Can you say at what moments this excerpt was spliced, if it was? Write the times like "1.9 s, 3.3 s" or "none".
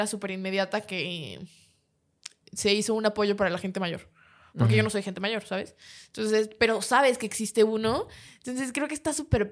none